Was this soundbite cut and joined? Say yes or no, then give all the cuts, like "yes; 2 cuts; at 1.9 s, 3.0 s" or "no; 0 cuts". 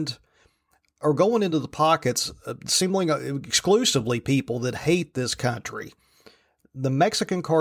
no; 0 cuts